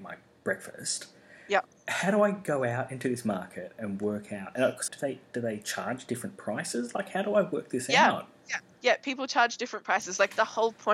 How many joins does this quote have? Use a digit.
1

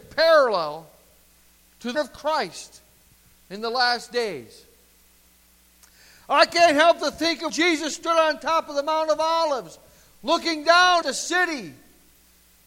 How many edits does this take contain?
3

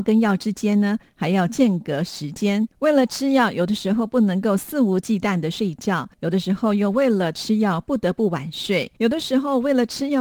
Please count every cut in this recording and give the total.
3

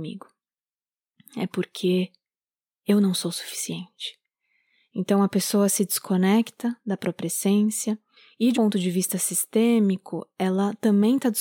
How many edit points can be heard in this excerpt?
1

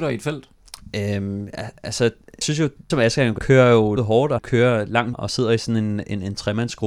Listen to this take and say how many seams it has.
6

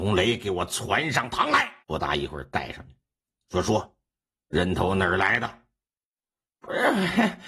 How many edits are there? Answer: 1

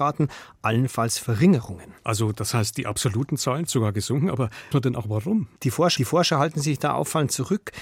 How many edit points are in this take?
5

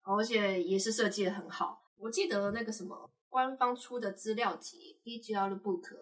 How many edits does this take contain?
1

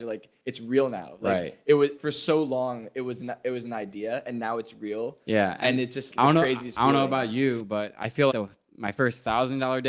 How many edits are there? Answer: 3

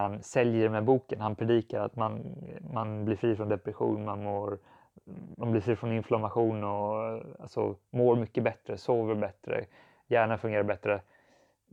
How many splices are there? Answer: 0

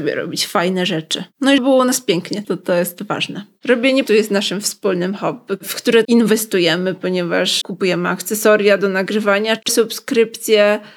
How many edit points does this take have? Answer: 6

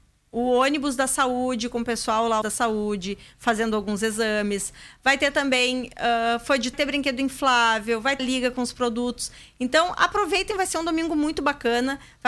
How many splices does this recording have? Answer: 3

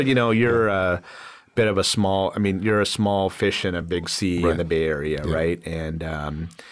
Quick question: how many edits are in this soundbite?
0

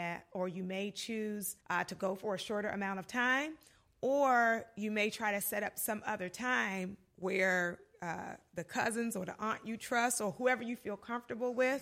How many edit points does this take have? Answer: 1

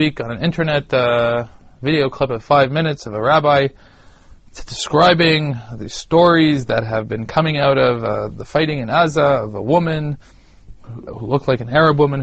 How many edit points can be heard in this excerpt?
2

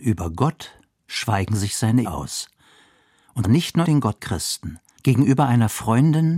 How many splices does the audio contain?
5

